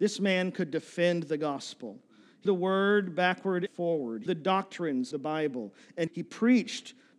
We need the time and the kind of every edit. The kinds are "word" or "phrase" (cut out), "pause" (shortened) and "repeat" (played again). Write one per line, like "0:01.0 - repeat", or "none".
0:02.4 - word
0:03.7 - word
0:04.3 - word
0:05.1 - word
0:06.1 - word

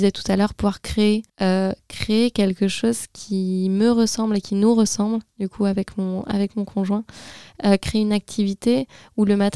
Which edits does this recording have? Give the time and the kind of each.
0:01.3 - pause

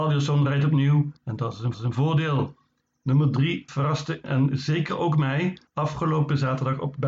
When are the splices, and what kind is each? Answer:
0:01.2 - pause
0:01.7 - repeat
0:03.7 - word
0:04.2 - word
0:05.7 - pause

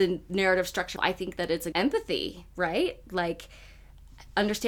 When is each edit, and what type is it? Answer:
0:01.0 - word
0:01.7 - phrase

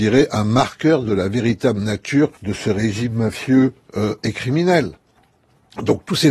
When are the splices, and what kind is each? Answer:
0:02.4 - pause

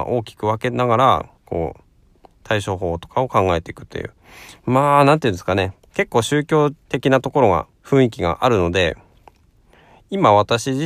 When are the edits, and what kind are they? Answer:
0:01.4 - pause
0:06.8 - pause
0:07.7 - pause

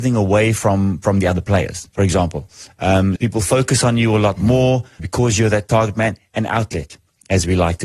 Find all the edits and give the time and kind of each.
0:01.9 - pause
0:03.2 - word
0:05.0 - word

